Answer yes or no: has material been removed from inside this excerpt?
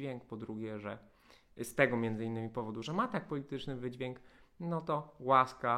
no